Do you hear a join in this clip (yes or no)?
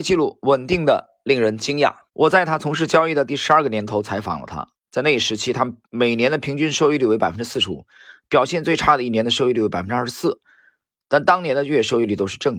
yes